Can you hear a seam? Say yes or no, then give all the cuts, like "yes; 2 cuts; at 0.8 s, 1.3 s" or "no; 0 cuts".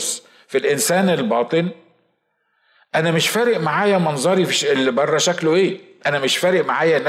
no; 0 cuts